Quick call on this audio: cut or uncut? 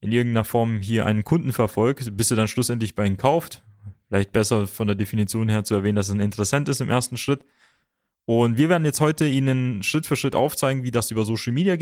uncut